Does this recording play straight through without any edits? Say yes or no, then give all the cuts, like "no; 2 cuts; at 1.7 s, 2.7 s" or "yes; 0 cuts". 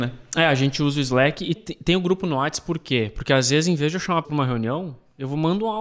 no; 2 cuts; at 1.6 s, 4.2 s